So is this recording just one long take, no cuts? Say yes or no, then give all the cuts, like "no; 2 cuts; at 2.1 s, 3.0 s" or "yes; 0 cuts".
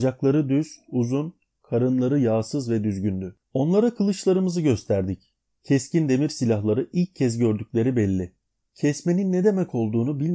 no; 1 cut; at 3.4 s